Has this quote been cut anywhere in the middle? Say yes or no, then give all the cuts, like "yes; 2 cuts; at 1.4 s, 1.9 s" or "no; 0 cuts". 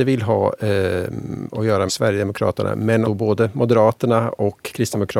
yes; 2 cuts; at 1.9 s, 3.0 s